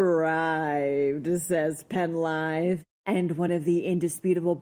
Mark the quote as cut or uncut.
uncut